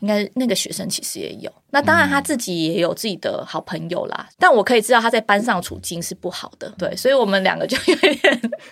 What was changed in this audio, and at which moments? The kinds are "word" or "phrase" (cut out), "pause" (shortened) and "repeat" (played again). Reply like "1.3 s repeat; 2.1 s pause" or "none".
6.8 s word